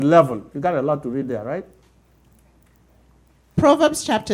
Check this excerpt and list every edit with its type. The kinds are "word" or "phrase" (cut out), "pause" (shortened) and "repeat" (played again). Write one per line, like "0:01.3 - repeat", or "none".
none

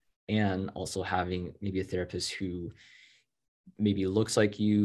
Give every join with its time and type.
none

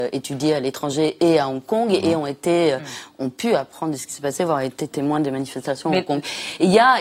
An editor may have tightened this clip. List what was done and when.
none

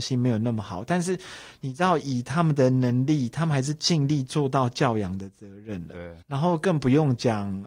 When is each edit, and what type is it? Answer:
0:06.2 - pause

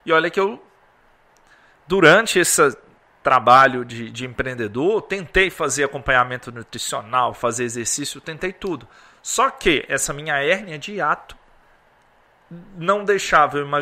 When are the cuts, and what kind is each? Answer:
none

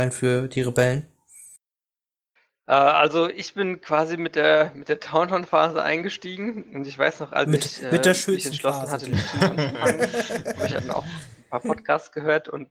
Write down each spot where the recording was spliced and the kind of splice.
none

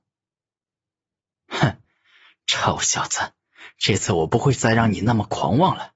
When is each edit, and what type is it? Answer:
none

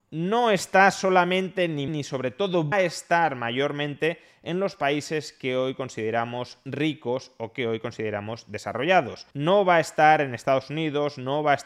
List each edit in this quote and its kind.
0:01.9 - word
0:02.7 - word
0:09.3 - pause

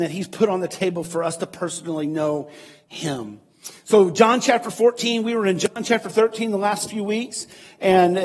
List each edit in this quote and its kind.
none

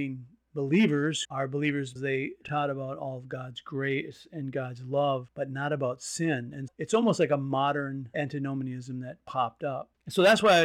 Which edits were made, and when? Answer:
0:01.2 - word
0:02.0 - word
0:02.4 - word
0:06.7 - word

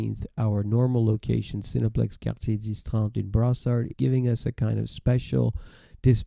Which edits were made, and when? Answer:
0:03.9 - word

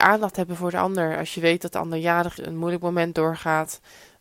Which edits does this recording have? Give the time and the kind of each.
0:02.4 - word

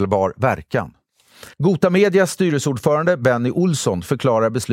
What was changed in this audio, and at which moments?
0:01.5 - pause

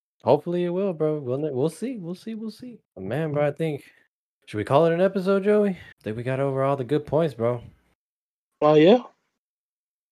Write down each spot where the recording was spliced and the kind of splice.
0:02.8 - pause
0:04.3 - pause
0:05.9 - pause

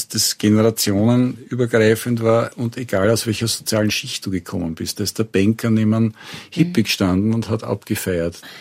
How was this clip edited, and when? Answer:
none

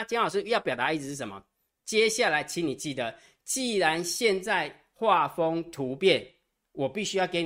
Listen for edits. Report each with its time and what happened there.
none

